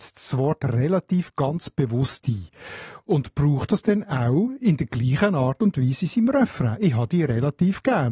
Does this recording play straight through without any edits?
yes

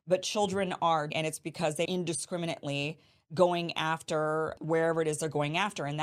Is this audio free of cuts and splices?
no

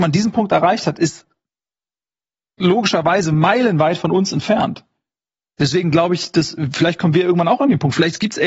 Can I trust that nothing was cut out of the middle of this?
yes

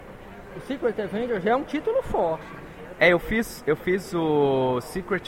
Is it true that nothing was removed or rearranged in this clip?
yes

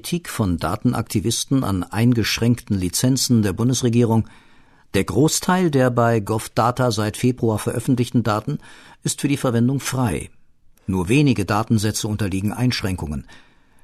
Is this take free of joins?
yes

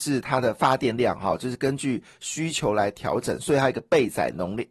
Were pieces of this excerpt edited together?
no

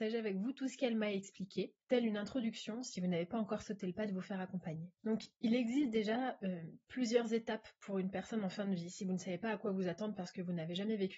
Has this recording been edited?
yes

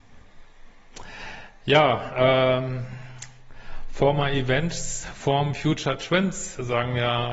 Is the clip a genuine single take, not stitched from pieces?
yes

